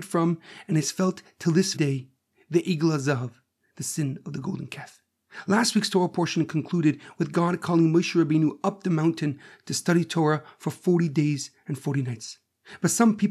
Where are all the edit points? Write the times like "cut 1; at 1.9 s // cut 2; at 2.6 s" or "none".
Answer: cut 1; at 1.7 s